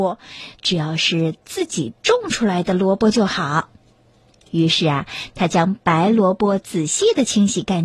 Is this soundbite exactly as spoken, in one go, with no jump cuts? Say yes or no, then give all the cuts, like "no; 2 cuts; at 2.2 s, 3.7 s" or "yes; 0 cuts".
yes; 0 cuts